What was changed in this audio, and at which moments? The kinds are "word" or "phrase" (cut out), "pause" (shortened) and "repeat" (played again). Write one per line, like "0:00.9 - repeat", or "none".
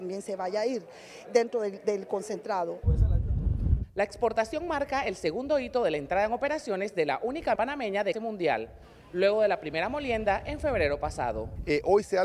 0:01.3 - word
0:07.6 - word
0:08.1 - word